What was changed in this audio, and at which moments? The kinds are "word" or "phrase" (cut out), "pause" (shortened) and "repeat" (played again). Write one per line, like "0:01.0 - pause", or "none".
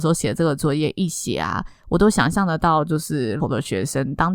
0:03.4 - word